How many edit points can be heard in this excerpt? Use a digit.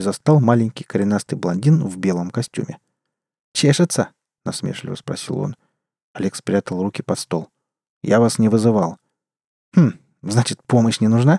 0